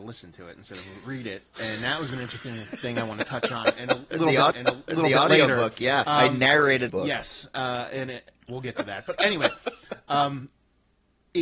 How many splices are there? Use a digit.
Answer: 4